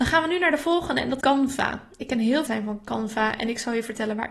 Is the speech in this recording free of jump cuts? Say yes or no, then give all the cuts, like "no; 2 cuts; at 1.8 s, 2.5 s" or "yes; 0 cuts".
no; 2 cuts; at 1.2 s, 2.5 s